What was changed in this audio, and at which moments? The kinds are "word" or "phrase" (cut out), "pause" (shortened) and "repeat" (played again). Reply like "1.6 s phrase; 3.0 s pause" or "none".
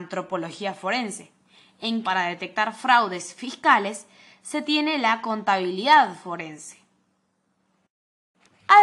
2.0 s word